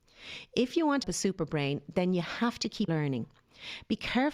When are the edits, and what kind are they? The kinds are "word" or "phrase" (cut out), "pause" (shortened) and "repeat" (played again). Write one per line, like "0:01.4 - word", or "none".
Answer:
0:01.0 - word
0:02.9 - word